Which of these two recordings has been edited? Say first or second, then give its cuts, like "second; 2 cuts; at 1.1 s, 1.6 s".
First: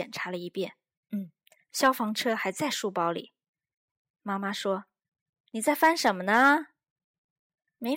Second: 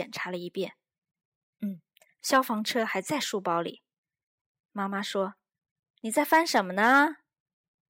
first; 1 cut; at 1.0 s